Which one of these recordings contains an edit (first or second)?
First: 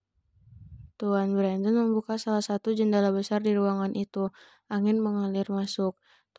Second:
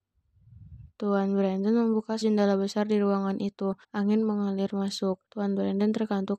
second